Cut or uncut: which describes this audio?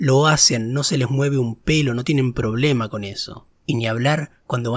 uncut